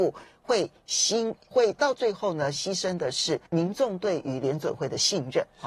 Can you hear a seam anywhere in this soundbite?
yes; 2 cuts; at 1.5 s, 3.5 s

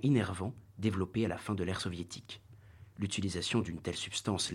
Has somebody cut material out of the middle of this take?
no; 0 cuts

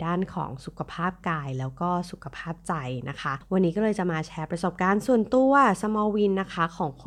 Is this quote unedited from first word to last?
yes; 0 cuts

